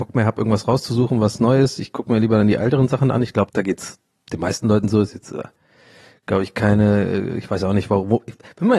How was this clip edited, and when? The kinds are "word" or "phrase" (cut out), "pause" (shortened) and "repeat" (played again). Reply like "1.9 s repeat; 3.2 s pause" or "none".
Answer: 3.5 s word